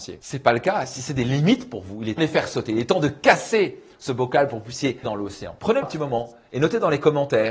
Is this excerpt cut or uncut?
cut